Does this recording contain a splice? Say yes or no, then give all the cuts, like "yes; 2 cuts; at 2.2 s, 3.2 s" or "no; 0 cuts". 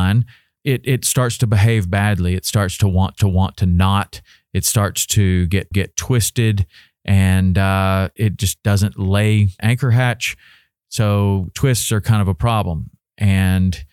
yes; 4 cuts; at 3.2 s, 5.7 s, 8.2 s, 9.6 s